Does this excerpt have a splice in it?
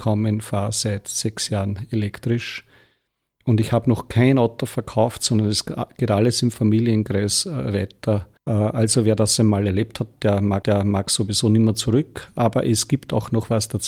yes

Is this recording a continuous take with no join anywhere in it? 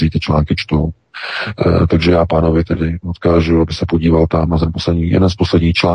yes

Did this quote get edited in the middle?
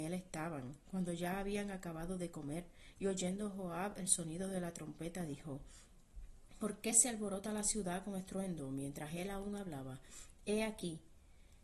no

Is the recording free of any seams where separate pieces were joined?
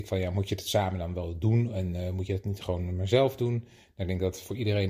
yes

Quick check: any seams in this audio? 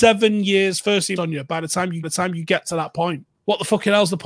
yes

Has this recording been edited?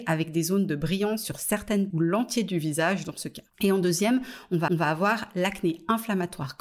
yes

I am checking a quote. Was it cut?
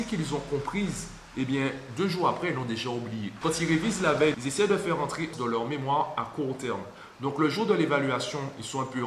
yes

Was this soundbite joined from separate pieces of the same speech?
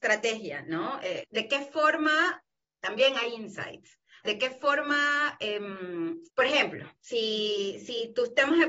yes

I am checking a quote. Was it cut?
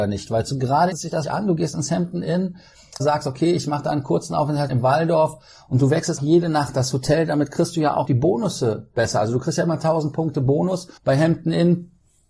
yes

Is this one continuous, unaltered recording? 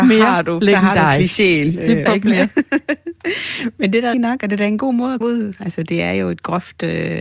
no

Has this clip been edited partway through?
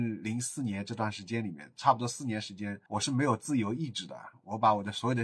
yes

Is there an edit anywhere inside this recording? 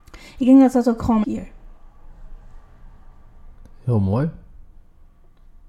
yes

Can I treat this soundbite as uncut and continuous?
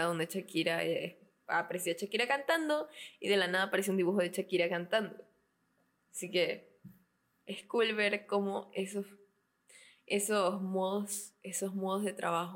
yes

